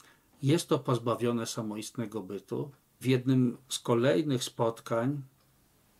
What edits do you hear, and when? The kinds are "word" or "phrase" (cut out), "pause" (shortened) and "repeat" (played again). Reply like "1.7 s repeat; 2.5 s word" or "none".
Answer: 3.0 s word; 3.6 s pause